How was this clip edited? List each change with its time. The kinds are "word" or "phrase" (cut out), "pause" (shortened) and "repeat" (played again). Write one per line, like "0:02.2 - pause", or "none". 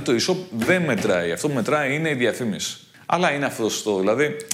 none